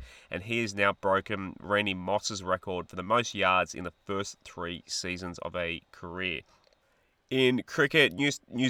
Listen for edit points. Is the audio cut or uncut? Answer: uncut